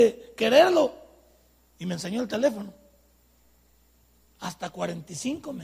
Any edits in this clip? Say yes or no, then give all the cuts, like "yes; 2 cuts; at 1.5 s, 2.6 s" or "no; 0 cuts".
no; 0 cuts